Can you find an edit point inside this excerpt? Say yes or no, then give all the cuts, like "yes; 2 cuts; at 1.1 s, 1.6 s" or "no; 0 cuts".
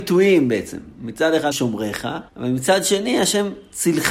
yes; 2 cuts; at 1.5 s, 2.3 s